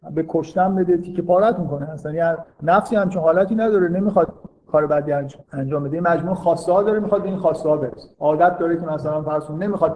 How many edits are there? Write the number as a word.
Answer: two